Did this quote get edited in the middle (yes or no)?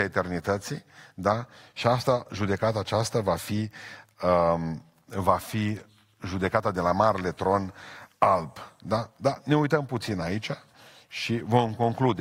no